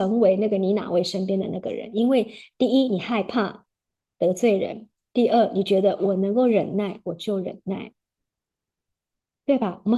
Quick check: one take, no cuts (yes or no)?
yes